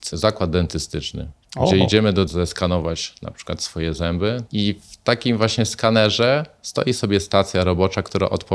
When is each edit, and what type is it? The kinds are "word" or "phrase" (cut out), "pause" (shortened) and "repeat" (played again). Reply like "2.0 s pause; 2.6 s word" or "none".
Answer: 2.3 s phrase